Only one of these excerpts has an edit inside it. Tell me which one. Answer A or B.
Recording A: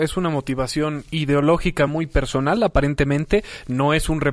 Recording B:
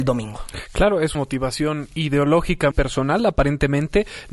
B